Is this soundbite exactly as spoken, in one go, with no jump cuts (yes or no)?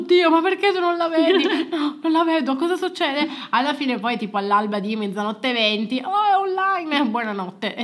yes